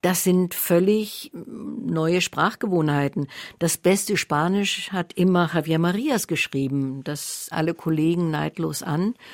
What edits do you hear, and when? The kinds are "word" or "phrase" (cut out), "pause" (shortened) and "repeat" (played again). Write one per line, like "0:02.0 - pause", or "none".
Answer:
0:01.3 - word
0:07.5 - word